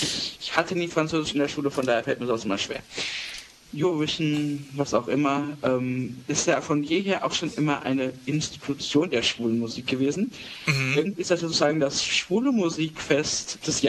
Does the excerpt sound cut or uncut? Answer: uncut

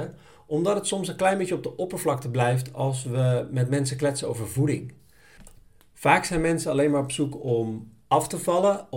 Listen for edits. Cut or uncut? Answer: uncut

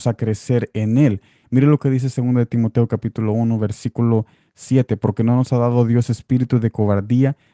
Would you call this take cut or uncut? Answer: uncut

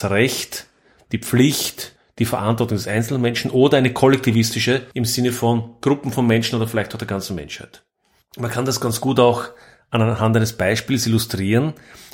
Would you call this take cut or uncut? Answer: uncut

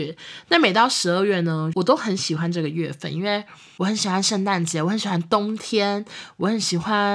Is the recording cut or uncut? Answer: uncut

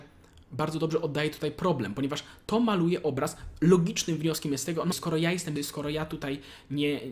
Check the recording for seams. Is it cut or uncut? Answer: cut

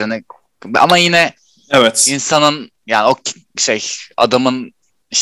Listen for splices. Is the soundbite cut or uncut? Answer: uncut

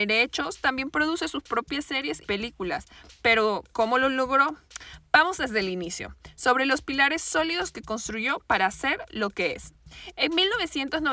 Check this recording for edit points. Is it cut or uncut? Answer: cut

